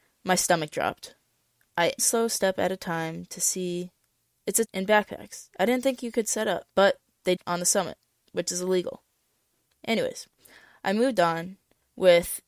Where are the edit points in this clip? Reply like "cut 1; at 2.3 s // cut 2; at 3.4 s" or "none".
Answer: cut 1; at 2.0 s // cut 2; at 4.7 s // cut 3; at 6.7 s // cut 4; at 7.4 s